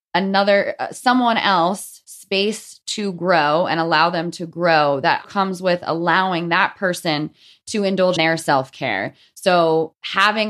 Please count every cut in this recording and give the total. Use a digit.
2